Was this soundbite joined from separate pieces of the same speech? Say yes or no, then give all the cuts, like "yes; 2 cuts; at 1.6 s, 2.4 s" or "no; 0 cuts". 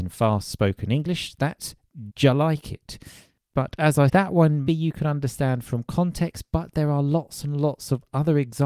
yes; 3 cuts; at 2.1 s, 4.1 s, 4.7 s